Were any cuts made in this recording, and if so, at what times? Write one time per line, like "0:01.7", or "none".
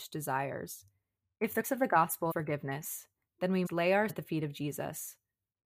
0:01.6
0:02.3
0:03.7
0:04.1